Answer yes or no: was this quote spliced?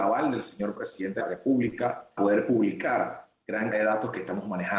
yes